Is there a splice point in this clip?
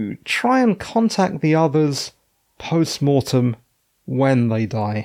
no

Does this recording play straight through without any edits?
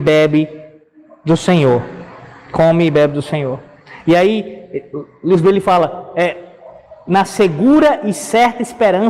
yes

